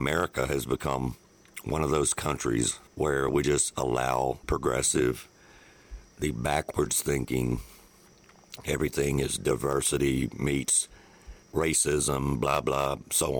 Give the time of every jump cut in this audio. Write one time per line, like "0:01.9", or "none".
0:02.9
0:04.4
0:11.4